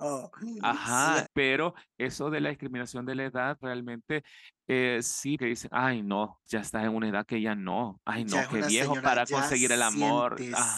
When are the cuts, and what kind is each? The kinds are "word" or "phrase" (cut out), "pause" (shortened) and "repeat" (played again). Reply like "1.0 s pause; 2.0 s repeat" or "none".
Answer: 1.3 s word; 3.6 s word; 5.4 s word; 6.5 s word